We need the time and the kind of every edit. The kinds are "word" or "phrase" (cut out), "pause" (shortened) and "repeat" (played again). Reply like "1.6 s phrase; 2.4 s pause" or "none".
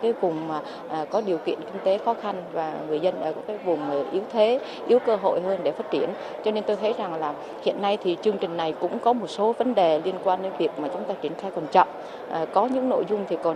none